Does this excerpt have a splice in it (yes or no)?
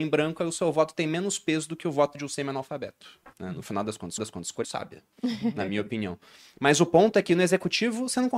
yes